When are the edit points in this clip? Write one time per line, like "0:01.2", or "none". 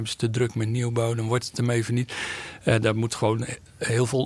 none

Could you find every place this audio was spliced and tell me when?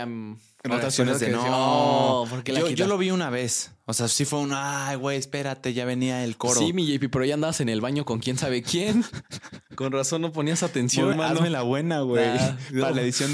0:11.1

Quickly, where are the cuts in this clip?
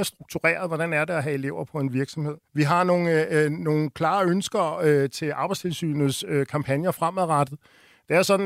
0:02.5

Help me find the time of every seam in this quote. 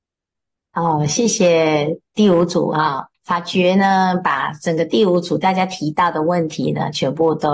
none

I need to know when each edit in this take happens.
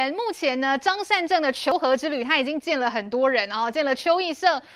none

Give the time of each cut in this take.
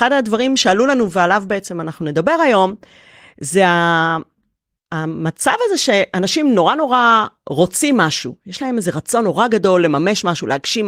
none

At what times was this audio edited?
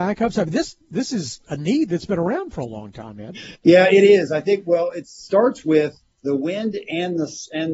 0:06.1

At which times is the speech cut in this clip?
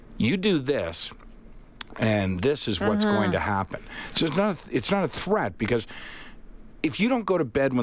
none

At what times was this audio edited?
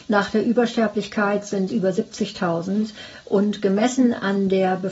0:01.7

